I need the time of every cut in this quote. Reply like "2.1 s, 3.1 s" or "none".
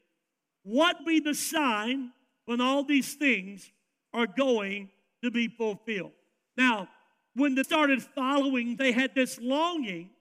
1.0 s, 7.6 s, 8.8 s